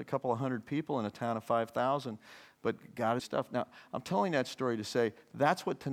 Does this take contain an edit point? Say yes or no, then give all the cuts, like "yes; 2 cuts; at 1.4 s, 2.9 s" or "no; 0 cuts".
yes; 1 cut; at 3.2 s